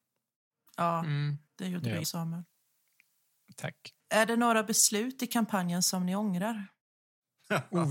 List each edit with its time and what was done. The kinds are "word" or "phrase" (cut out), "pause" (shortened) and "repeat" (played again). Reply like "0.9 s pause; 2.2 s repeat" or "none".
1.5 s pause; 2.0 s word; 4.0 s pause